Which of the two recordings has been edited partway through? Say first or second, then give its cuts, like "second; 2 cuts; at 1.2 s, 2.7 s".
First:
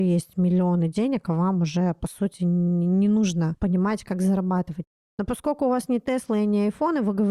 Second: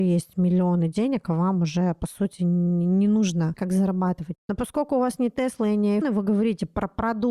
second; 3 cuts; at 3.5 s, 4.4 s, 6.0 s